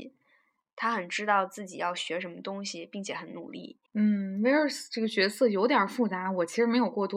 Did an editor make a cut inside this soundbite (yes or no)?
yes